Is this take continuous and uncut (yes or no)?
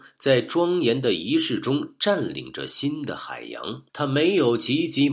no